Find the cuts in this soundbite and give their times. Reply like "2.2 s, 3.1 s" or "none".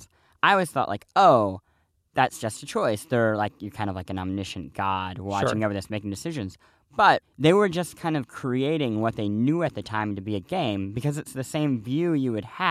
7.2 s